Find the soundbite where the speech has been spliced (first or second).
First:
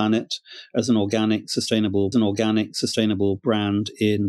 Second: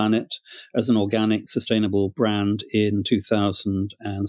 first